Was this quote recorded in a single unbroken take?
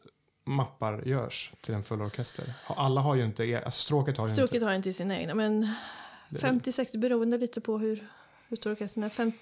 yes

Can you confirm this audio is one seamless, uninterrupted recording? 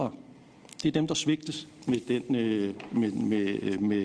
yes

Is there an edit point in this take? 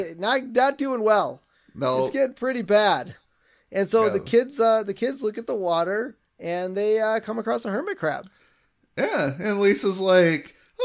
no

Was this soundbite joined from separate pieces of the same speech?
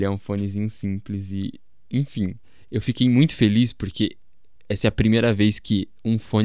no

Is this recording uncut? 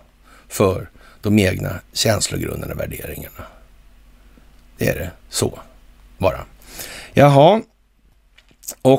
yes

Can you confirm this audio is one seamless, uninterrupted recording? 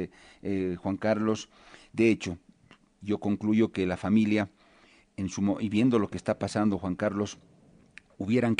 yes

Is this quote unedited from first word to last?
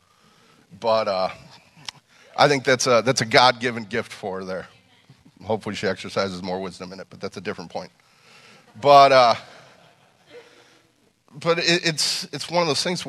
yes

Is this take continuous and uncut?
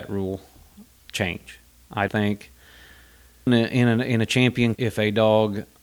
no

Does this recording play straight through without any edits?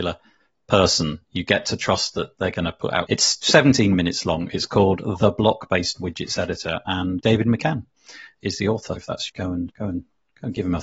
no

